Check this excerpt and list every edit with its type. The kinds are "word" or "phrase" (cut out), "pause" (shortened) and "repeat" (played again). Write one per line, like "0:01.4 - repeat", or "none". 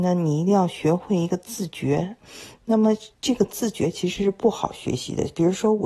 0:03.1 - pause